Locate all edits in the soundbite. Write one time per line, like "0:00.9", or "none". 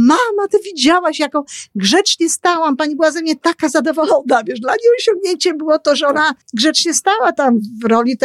0:06.4